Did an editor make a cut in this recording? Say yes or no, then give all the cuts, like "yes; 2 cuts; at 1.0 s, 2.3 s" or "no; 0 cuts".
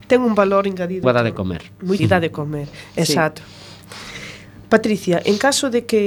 yes; 2 cuts; at 1.0 s, 2.0 s